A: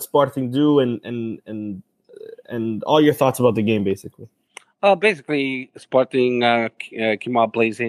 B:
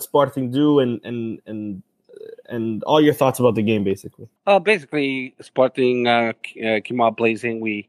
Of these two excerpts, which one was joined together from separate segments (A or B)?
B